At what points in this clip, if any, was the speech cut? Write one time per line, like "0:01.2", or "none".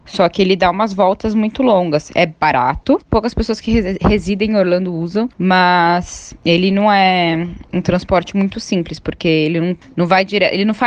none